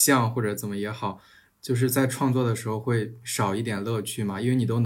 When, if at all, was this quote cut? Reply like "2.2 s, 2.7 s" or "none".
none